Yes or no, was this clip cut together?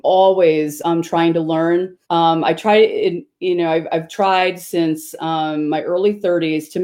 yes